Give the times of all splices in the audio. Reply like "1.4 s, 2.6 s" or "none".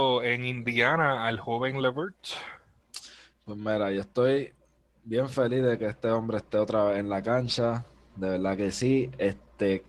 none

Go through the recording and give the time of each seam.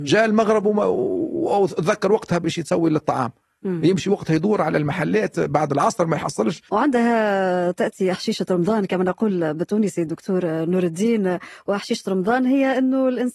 none

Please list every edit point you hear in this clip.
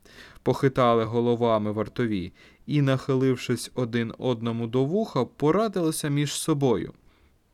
none

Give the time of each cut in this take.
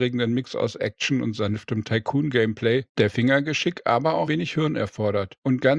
4.3 s

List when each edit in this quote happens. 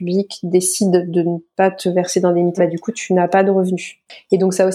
2.6 s

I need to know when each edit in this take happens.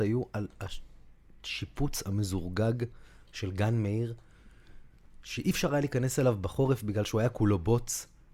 none

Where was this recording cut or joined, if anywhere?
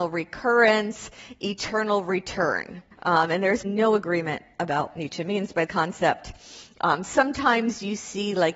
2.9 s, 3.6 s, 4.9 s, 5.7 s

